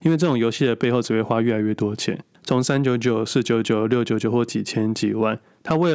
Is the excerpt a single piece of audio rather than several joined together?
yes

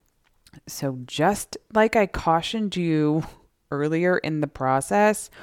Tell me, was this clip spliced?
no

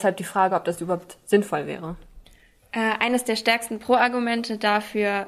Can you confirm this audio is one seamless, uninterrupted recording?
yes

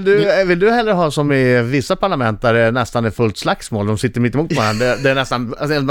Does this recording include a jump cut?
no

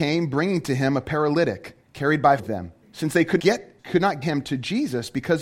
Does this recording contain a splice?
yes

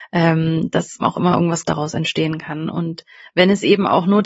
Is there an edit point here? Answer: yes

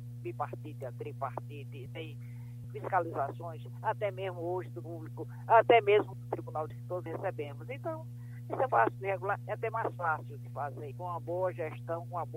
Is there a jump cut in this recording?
yes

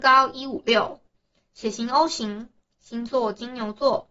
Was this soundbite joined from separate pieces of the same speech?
no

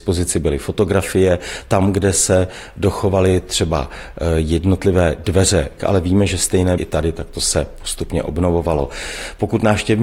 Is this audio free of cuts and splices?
no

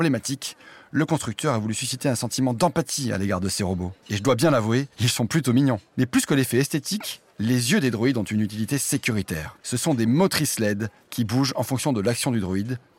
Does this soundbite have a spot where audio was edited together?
yes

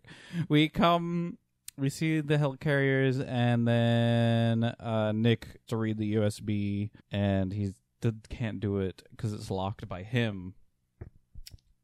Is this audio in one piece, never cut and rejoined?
no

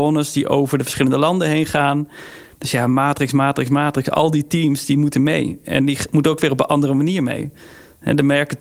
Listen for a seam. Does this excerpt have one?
no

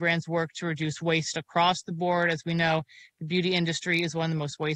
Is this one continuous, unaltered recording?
yes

